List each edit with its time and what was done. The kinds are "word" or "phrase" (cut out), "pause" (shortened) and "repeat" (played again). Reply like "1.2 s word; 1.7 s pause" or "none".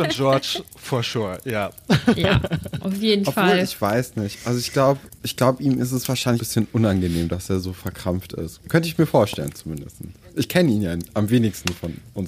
6.4 s phrase